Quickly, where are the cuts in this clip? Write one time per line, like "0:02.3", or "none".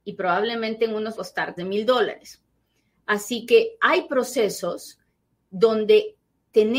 0:01.2
0:01.6